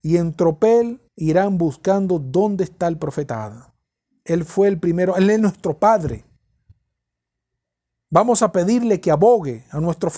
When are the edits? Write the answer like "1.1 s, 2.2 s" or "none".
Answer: 1.1 s